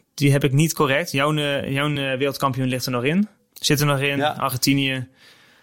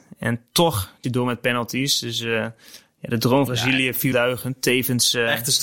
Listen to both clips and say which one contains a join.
second; 3 cuts; at 1.0 s, 3.5 s, 4.1 s

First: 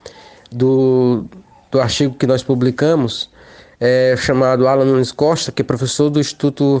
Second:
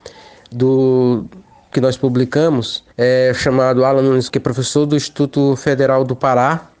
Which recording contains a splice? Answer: second; 3 cuts; at 1.7 s, 2.9 s, 4.3 s

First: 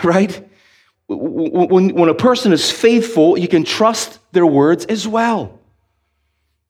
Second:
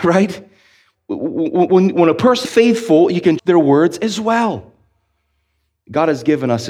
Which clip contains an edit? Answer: second; 2 cuts; at 2.4 s, 3.4 s

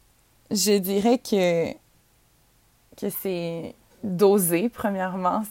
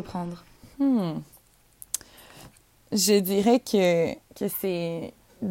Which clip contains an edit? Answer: second; 2 cuts; at 2.6 s, 4.2 s

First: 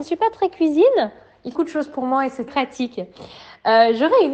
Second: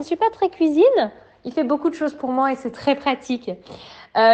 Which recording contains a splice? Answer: first; 2 cuts; at 1.5 s, 2.5 s

